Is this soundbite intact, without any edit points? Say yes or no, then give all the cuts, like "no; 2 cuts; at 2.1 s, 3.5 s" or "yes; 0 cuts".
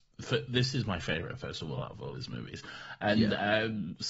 yes; 0 cuts